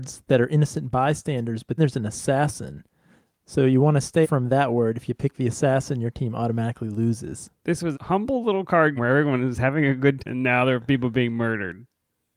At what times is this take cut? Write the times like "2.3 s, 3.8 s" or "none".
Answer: 1.8 s, 4.2 s, 7.9 s, 9.0 s, 10.2 s